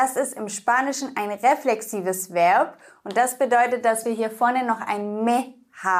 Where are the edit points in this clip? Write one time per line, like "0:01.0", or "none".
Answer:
none